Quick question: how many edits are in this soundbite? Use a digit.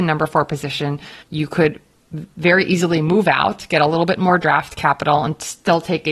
1